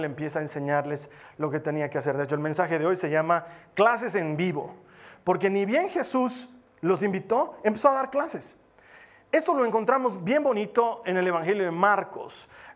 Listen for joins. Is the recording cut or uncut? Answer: uncut